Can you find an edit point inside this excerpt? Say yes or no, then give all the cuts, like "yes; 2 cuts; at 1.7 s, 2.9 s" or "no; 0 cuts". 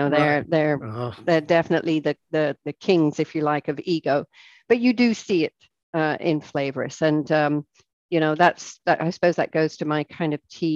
yes; 1 cut; at 2.6 s